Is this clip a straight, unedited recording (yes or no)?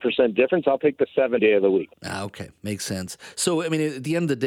no